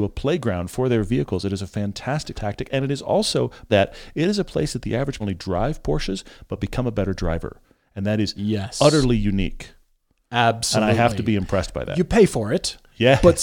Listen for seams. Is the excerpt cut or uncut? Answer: cut